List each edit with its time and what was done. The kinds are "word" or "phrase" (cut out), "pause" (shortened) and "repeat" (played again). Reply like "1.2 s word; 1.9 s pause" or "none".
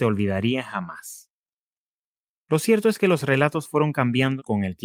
none